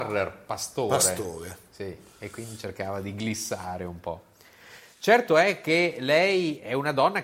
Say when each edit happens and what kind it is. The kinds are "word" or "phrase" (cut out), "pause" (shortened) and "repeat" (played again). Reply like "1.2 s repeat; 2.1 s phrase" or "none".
none